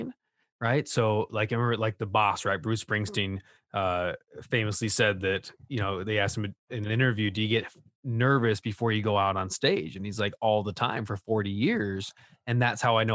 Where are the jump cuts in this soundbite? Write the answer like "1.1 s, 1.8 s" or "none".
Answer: none